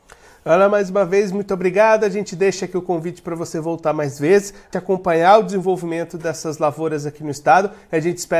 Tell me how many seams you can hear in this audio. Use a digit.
1